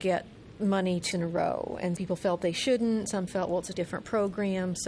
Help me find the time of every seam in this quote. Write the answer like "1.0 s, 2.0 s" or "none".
1.1 s, 2.0 s, 3.3 s, 3.7 s